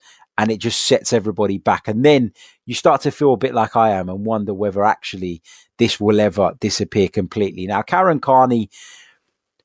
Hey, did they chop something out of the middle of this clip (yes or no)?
no